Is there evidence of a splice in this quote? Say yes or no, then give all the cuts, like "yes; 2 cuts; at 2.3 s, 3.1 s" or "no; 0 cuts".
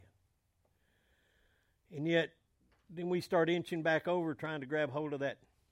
no; 0 cuts